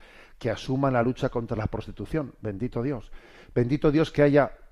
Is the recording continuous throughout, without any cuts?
yes; 0 cuts

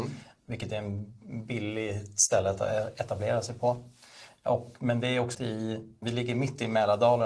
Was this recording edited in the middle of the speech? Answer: yes; 2 cuts; at 5.3 s, 6.0 s

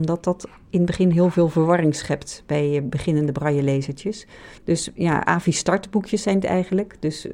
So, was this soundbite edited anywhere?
yes; 1 cut; at 4.6 s

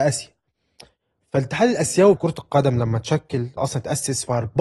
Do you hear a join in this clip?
yes; 2 cuts; at 2.2 s, 3.6 s

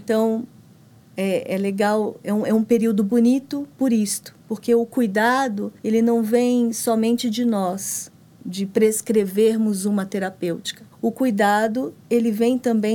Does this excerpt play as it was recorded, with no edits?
no; 5 cuts; at 3.7 s, 4.4 s, 5.8 s, 8.2 s, 10.9 s

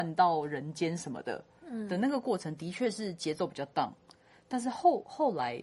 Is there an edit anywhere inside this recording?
no; 0 cuts

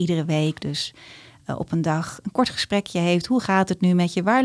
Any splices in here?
no; 0 cuts

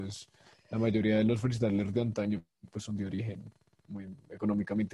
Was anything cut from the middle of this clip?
no; 0 cuts

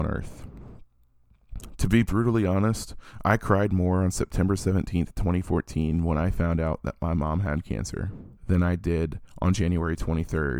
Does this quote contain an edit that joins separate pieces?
yes; 1 cut; at 8.4 s

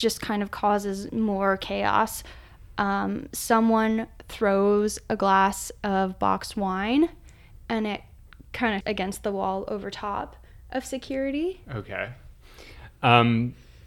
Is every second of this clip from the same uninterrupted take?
no; 1 cut; at 8.8 s

